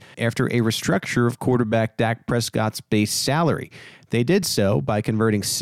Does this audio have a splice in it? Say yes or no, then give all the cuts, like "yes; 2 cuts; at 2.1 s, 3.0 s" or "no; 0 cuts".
no; 0 cuts